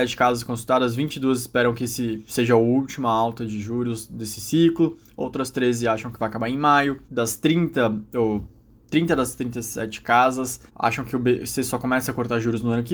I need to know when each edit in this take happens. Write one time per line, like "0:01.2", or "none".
0:07.0
0:10.7